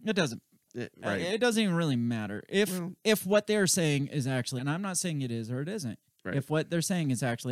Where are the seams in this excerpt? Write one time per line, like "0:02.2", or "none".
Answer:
0:04.6